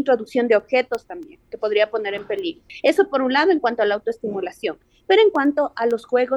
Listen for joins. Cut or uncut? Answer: cut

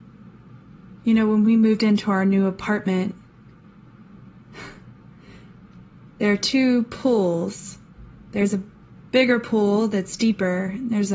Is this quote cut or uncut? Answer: uncut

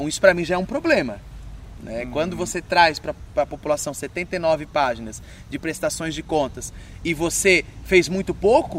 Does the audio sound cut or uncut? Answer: uncut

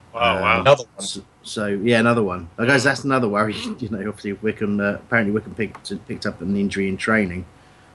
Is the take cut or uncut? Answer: cut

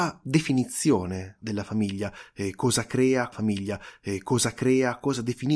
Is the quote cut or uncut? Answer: cut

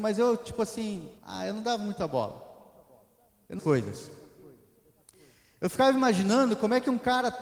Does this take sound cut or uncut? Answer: cut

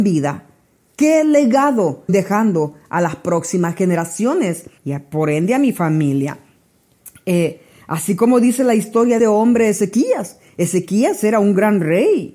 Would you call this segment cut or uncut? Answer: cut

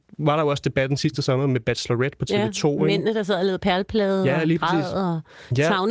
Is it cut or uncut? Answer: uncut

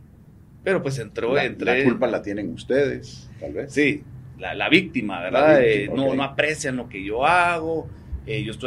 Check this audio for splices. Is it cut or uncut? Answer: uncut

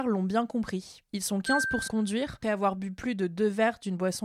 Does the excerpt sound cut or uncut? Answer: cut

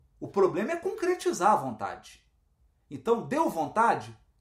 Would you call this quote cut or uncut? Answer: uncut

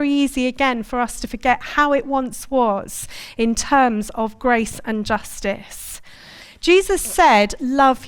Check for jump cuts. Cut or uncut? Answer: uncut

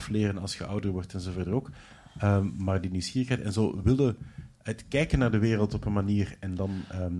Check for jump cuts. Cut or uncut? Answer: uncut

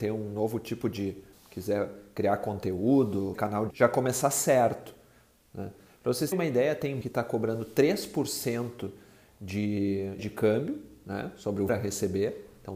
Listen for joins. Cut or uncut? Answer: cut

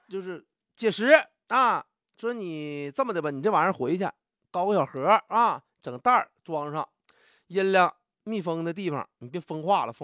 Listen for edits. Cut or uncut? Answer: uncut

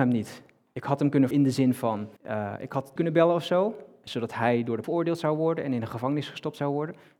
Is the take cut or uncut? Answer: cut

